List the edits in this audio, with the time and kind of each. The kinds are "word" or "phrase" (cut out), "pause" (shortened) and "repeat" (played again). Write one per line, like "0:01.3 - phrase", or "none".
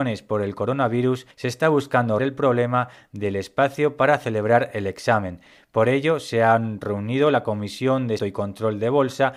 0:01.3 - pause
0:02.2 - word
0:08.2 - word